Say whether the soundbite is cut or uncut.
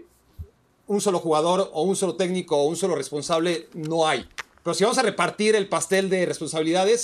uncut